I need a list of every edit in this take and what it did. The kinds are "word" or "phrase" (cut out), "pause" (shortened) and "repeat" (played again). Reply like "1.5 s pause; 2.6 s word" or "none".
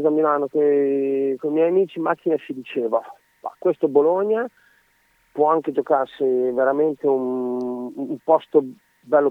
none

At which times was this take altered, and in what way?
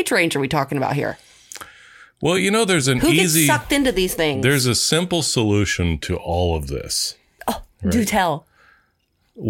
none

